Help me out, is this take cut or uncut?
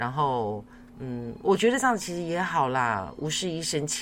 uncut